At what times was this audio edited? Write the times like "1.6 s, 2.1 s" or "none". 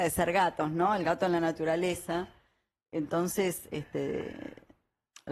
none